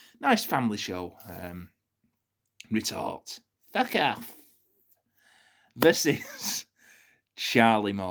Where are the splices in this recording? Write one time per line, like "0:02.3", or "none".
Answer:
none